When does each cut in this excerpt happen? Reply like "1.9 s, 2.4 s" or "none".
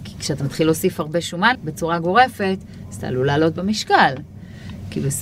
1.5 s